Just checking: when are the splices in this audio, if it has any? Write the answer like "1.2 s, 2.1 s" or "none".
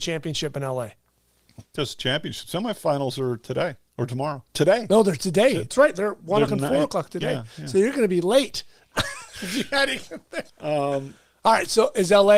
4.5 s, 5.7 s, 6.5 s, 10.5 s